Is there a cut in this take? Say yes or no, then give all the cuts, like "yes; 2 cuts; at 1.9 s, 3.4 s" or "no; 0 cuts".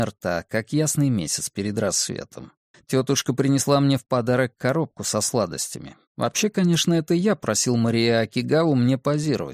yes; 2 cuts; at 2.7 s, 6.1 s